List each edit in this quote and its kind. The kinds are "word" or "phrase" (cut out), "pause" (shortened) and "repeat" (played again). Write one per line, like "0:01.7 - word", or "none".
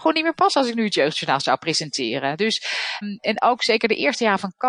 0:03.0 - word